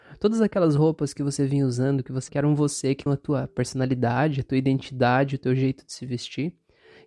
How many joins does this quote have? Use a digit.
2